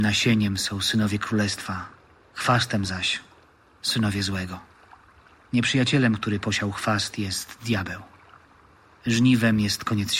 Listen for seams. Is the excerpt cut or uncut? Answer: uncut